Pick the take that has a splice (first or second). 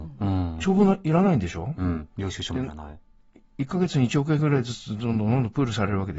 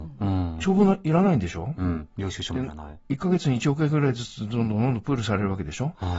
second